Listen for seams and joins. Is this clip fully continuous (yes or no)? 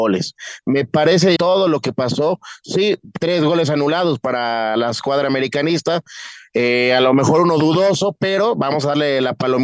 no